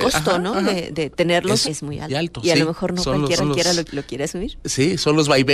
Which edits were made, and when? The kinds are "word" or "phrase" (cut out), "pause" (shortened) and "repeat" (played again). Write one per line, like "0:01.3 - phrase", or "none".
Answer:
0:01.6 - phrase
0:02.1 - word
0:03.4 - repeat
0:03.9 - word